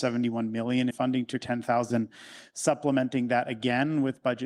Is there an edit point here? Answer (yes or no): yes